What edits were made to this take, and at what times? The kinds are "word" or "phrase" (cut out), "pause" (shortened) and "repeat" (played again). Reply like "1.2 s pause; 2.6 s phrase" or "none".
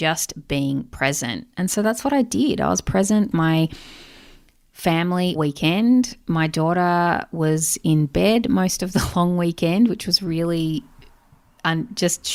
3.3 s word; 5.4 s word